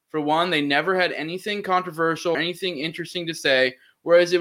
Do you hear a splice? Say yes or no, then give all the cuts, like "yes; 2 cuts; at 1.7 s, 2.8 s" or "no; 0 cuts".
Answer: yes; 1 cut; at 2.3 s